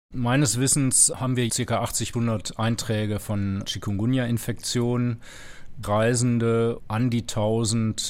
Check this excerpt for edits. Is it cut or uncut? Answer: cut